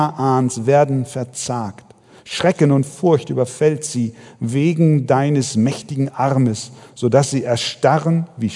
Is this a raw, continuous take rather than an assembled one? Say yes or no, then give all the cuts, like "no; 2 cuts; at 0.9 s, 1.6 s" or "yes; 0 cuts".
yes; 0 cuts